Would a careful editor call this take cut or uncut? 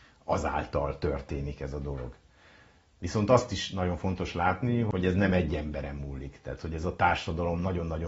uncut